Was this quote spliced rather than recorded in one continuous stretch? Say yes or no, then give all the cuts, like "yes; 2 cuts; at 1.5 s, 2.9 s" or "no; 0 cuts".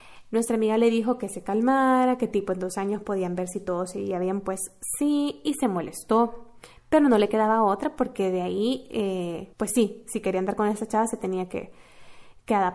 yes; 1 cut; at 9.5 s